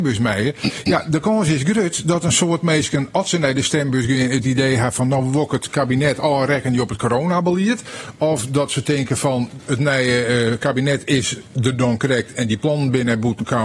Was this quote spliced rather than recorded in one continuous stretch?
no; 0 cuts

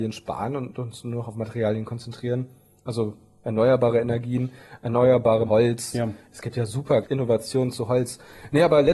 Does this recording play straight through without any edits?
no; 2 cuts; at 5.5 s, 7.0 s

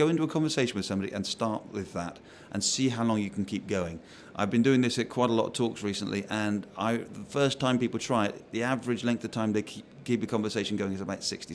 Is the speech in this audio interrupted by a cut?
no; 0 cuts

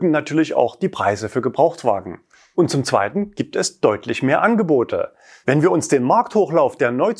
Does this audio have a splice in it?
no; 0 cuts

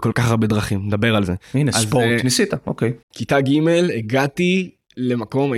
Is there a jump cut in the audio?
yes; 1 cut; at 3.0 s

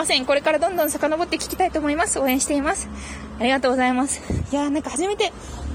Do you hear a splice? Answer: no; 0 cuts

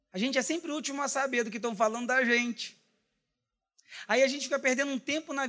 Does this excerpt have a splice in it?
no; 0 cuts

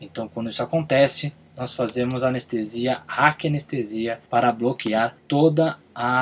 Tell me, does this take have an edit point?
yes; 1 cut; at 4.3 s

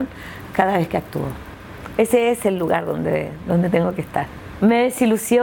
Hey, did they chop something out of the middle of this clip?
no; 0 cuts

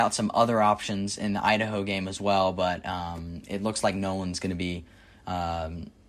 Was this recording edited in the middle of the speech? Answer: no; 0 cuts

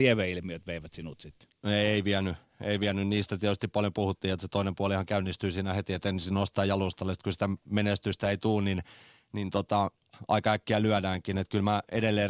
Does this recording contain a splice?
no; 0 cuts

